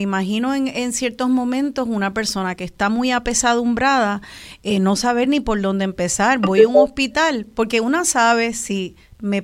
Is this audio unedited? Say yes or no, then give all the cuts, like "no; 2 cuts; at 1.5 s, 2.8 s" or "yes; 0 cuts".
yes; 0 cuts